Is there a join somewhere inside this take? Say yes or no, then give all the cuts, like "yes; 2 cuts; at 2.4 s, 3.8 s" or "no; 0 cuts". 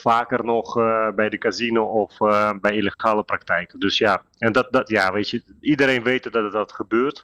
no; 0 cuts